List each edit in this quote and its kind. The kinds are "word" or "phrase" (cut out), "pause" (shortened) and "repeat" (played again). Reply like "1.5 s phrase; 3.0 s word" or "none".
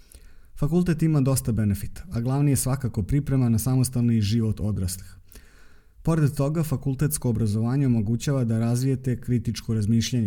none